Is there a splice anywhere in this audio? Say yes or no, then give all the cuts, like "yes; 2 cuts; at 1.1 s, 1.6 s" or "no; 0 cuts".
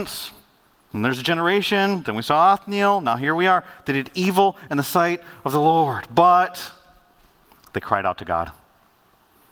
no; 0 cuts